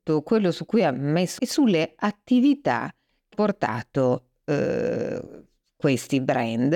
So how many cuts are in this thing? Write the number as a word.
two